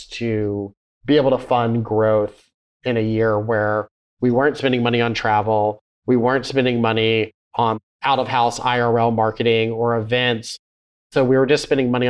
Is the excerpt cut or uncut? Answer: uncut